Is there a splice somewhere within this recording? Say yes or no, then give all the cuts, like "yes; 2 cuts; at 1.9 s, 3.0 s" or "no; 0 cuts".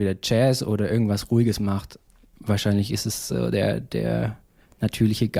no; 0 cuts